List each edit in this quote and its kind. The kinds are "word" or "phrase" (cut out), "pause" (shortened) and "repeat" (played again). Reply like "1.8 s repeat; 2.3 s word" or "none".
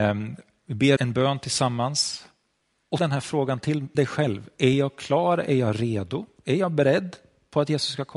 1.0 s word; 3.0 s word; 3.9 s word